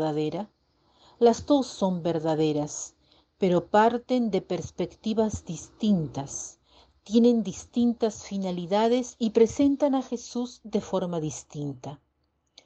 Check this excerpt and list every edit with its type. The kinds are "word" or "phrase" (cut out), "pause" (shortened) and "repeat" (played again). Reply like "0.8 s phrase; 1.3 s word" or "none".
none